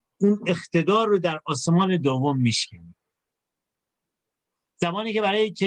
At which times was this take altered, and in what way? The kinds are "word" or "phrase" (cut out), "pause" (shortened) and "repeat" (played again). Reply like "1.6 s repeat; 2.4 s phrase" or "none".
none